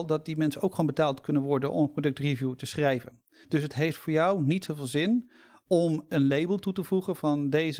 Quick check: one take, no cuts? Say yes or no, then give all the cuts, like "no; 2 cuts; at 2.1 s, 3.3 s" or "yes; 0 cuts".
yes; 0 cuts